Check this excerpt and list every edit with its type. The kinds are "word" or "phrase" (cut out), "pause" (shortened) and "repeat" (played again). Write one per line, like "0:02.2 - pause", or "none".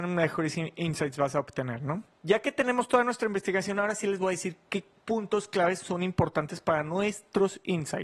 none